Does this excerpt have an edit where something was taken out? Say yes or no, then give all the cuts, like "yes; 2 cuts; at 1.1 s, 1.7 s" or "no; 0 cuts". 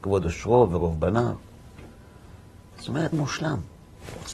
yes; 1 cut; at 3.1 s